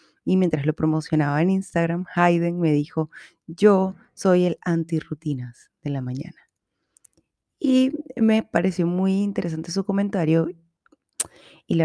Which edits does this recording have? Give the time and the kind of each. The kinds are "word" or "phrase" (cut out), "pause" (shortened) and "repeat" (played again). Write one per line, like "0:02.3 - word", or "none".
none